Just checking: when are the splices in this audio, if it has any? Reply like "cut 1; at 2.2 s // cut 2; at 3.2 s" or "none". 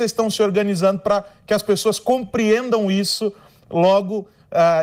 none

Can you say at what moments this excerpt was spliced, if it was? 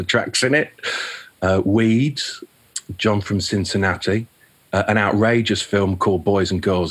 none

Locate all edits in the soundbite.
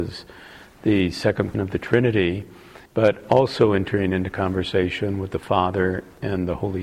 cut 1; at 1.5 s // cut 2; at 2.9 s

